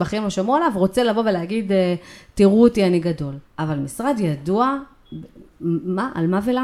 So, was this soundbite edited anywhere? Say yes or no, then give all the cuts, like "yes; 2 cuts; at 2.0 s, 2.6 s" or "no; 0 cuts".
yes; 2 cuts; at 3.4 s, 5.5 s